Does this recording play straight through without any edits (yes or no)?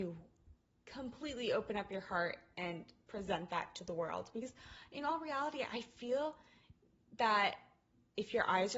yes